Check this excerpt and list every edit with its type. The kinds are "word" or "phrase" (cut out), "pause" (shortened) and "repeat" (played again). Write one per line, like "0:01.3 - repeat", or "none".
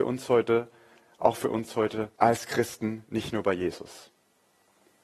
0:02.2 - pause